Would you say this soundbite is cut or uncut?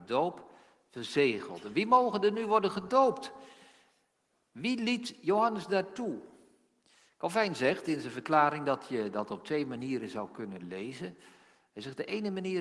uncut